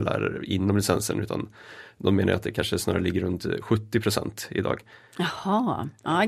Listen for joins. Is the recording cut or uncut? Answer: uncut